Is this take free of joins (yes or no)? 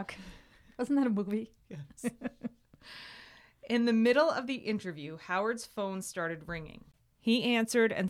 yes